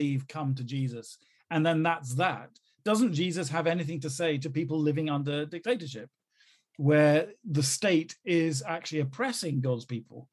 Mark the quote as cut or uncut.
uncut